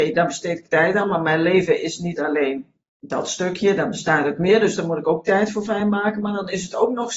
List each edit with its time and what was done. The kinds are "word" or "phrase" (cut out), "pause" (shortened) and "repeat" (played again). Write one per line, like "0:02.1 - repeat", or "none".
none